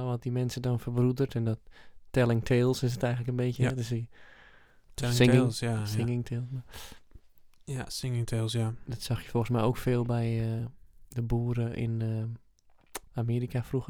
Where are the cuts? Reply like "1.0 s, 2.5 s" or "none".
none